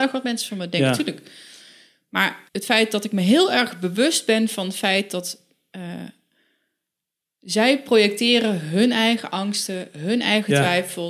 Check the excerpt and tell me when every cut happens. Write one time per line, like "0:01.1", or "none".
0:02.5